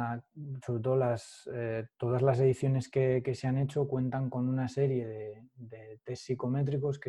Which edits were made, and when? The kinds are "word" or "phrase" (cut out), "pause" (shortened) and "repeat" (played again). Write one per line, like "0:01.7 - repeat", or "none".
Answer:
none